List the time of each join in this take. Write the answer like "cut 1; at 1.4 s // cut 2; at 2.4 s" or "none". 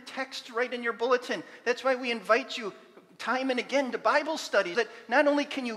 cut 1; at 4.7 s